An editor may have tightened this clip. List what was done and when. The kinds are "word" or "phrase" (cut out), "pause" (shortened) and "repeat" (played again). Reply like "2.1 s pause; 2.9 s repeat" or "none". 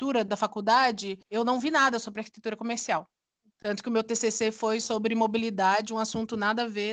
1.2 s pause